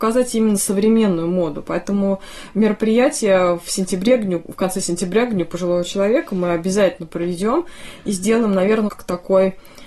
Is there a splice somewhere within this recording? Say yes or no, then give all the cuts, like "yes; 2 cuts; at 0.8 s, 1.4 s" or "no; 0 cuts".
yes; 1 cut; at 8.9 s